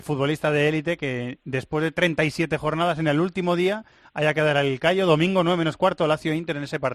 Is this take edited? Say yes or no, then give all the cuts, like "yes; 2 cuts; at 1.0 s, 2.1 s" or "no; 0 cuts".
no; 0 cuts